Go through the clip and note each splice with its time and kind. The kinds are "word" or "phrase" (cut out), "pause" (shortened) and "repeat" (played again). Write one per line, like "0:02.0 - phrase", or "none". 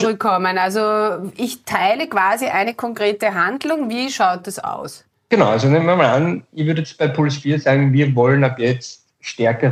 0:05.1 - pause